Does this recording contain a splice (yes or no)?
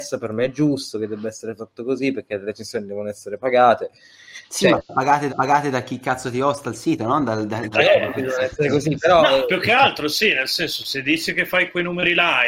yes